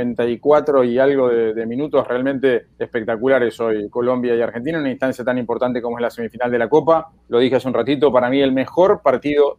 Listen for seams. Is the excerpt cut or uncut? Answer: cut